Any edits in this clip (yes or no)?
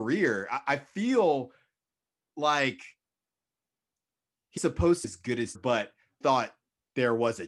yes